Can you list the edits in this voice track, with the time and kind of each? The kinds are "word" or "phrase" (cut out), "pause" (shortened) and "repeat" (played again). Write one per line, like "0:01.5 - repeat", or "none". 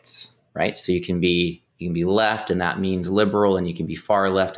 none